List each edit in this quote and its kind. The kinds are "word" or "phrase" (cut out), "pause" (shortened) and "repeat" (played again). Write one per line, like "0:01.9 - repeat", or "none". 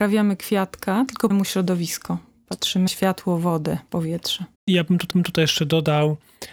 0:01.3 - word
0:02.9 - word
0:04.5 - pause
0:05.1 - repeat